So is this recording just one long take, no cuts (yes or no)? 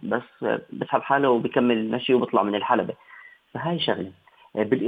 yes